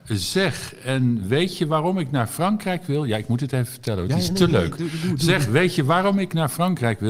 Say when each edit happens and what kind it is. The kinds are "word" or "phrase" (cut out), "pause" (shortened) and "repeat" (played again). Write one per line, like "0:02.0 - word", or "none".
none